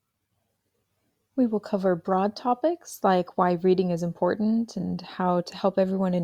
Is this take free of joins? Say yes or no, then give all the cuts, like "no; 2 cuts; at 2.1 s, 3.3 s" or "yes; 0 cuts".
yes; 0 cuts